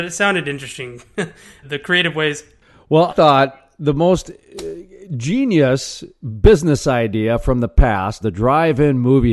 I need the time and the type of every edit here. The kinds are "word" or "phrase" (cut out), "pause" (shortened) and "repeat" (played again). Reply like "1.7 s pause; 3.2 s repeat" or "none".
1.6 s word; 3.1 s word; 8.2 s word